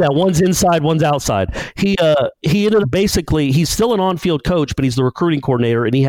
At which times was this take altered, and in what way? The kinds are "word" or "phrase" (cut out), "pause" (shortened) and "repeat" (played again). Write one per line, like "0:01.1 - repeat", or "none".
0:02.4 - pause
0:02.8 - phrase